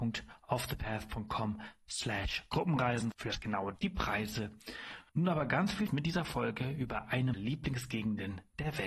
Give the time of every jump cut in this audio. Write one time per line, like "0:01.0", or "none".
0:03.1
0:03.8
0:05.1
0:05.9
0:07.3